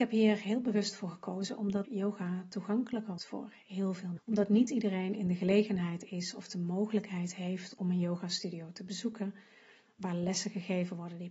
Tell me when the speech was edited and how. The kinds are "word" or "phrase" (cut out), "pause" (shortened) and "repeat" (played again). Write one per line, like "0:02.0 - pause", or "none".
0:01.8 - phrase
0:03.2 - word
0:04.2 - word

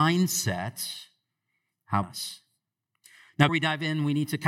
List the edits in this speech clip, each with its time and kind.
0:02.0 - word
0:03.5 - word

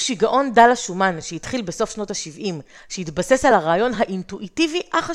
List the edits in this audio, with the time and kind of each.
none

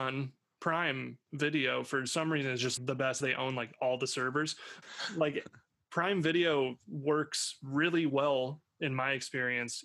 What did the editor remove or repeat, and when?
0:02.8 - word
0:03.2 - phrase
0:04.8 - phrase

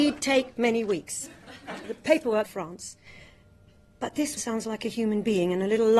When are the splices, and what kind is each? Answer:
0:01.8 - word
0:02.4 - phrase
0:04.4 - word

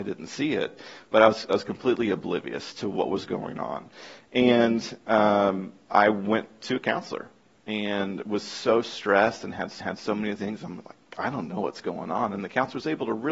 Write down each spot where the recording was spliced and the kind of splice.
0:09.8 - repeat

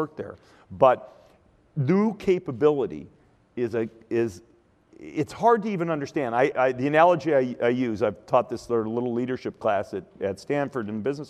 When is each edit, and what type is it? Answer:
0:06.5 - word

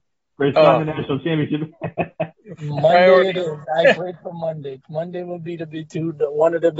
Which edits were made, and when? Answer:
0:04.0 - word

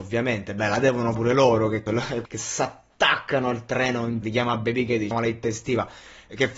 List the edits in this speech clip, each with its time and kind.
0:01.1 - word
0:01.9 - word
0:02.3 - word
0:04.2 - word
0:05.1 - word

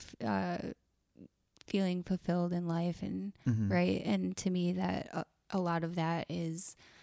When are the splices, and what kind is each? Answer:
none

